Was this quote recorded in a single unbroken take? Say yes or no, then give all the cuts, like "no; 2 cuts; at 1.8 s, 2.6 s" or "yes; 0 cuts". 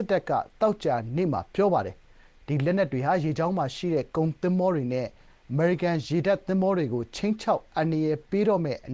yes; 0 cuts